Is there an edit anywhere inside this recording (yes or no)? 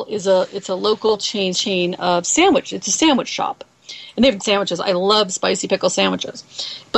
yes